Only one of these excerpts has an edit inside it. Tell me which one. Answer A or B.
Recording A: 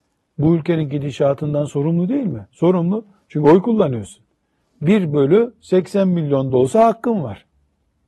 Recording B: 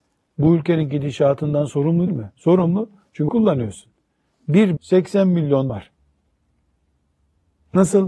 B